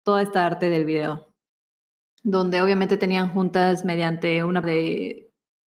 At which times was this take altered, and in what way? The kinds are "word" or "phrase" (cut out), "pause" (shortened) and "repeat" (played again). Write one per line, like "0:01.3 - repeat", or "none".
0:04.6 - word